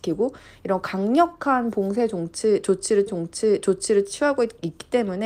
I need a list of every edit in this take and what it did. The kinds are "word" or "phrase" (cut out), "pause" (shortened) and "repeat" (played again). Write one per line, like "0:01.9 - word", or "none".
0:03.1 - repeat